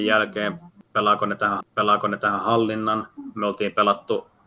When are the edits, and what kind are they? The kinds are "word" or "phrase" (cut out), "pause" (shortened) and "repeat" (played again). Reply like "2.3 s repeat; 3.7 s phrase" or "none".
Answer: 1.6 s repeat